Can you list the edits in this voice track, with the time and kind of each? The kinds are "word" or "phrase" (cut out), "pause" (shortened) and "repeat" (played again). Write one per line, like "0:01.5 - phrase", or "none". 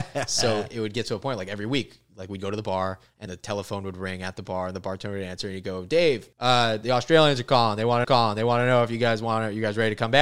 0:03.3 - word
0:06.3 - pause
0:08.0 - repeat